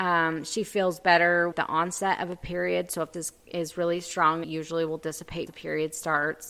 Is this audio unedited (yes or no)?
no